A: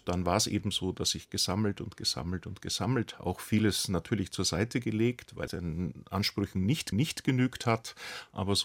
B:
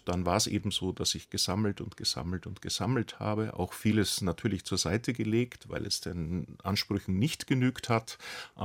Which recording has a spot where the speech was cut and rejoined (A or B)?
A